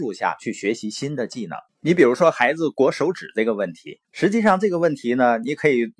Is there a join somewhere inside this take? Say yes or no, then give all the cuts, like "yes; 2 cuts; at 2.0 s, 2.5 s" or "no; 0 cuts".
yes; 2 cuts; at 1.7 s, 4.0 s